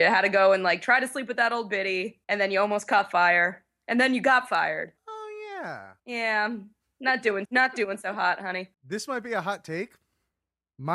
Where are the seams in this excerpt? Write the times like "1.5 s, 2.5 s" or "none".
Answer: 2.2 s, 5.0 s, 6.0 s, 7.4 s, 8.7 s